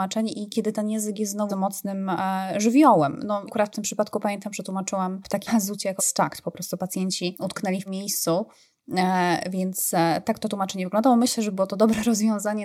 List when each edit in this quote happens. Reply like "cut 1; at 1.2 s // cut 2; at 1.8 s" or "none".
cut 1; at 1.5 s // cut 2; at 3.5 s // cut 3; at 5.5 s // cut 4; at 6.0 s // cut 5; at 7.9 s

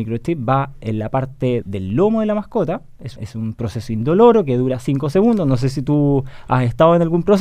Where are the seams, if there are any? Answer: cut 1; at 1.6 s // cut 2; at 3.2 s

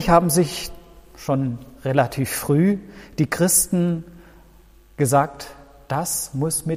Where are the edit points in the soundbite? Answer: none

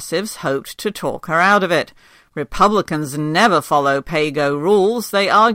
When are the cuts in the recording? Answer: none

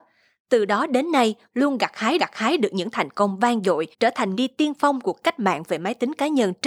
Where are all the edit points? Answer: cut 1; at 1.5 s // cut 2; at 2.2 s // cut 3; at 3.9 s // cut 4; at 4.3 s // cut 5; at 5.0 s

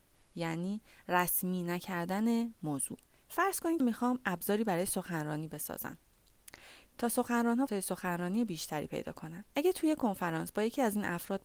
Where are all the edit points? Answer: cut 1; at 3.0 s // cut 2; at 3.8 s // cut 3; at 7.7 s // cut 4; at 9.5 s

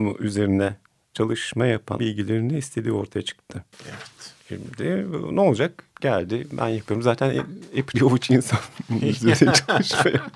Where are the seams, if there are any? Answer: cut 1; at 2.0 s // cut 2; at 3.7 s // cut 3; at 5.9 s // cut 4; at 7.9 s

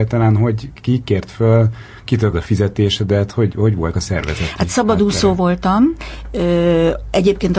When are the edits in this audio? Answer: cut 1; at 2.3 s // cut 2; at 3.5 s // cut 3; at 3.9 s

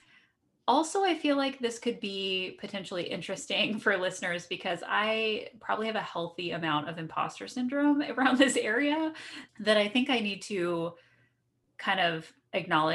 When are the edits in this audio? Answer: none

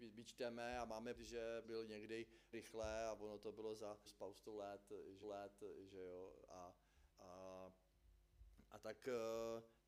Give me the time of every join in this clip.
cut 1; at 1.1 s // cut 2; at 1.6 s // cut 3; at 2.5 s // cut 4; at 4.1 s // cut 5; at 5.2 s // cut 6; at 7.1 s

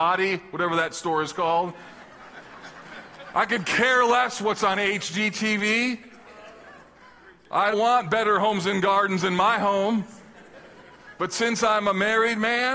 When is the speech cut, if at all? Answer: cut 1; at 7.7 s

